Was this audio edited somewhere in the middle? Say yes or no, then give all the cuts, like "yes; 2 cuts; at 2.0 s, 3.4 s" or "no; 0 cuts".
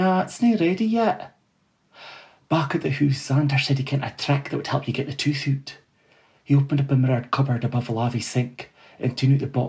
no; 0 cuts